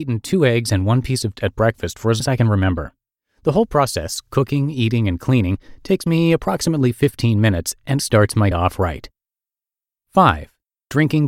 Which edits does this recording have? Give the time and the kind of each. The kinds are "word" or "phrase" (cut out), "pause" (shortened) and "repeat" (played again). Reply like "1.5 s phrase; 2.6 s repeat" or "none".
1.4 s word; 2.2 s word; 8.0 s word; 8.5 s word